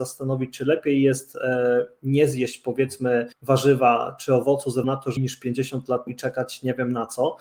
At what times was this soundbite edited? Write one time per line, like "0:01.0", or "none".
0:03.3
0:04.8
0:05.2
0:06.1

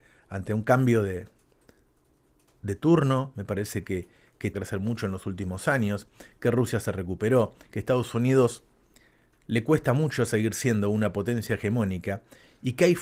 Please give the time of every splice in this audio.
0:04.5

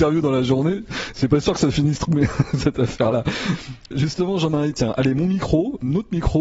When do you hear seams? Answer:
none

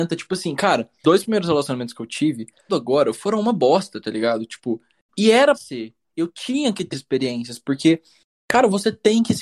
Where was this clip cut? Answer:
0:01.0
0:02.7
0:05.5
0:06.9

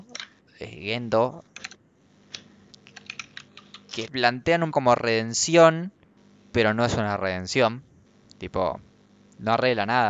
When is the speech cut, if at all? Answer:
0:04.0
0:04.7

